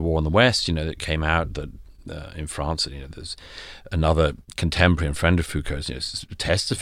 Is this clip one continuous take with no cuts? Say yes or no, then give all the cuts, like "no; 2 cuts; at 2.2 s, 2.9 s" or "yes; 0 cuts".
yes; 0 cuts